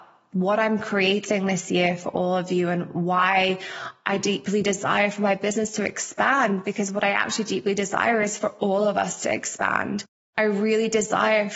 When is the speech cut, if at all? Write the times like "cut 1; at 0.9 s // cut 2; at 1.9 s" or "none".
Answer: none